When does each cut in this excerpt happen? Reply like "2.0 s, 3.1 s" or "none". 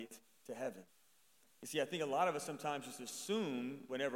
none